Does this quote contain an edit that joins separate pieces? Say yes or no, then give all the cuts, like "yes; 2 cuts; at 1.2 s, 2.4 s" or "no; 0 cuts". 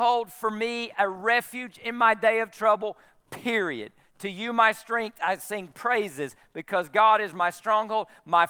no; 0 cuts